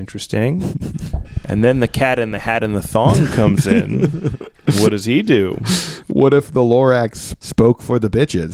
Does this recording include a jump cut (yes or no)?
no